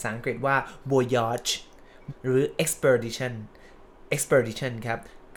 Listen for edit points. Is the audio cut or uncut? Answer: cut